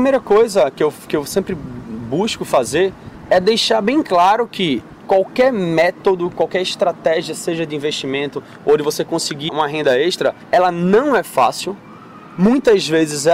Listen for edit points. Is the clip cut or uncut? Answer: cut